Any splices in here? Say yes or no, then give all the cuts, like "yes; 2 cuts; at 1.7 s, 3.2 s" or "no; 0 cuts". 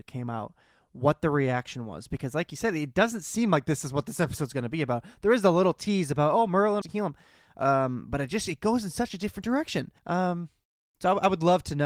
yes; 2 cuts; at 6.8 s, 10.0 s